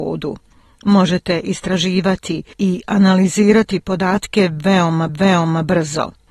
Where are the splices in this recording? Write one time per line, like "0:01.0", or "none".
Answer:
0:02.5
0:05.1

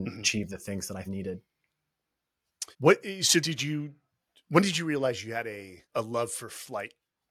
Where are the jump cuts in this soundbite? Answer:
0:01.1
0:02.7
0:03.4
0:05.9

